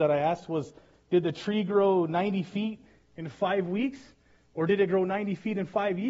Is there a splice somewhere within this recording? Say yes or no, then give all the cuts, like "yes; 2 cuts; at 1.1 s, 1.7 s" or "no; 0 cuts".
no; 0 cuts